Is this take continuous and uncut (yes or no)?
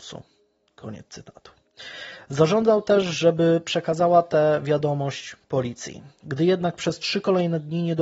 yes